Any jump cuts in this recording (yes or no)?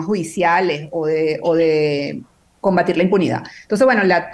no